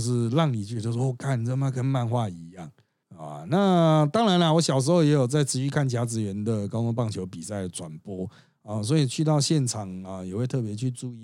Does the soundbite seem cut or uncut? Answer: uncut